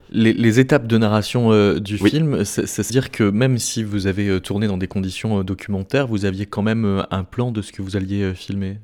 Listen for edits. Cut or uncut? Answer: cut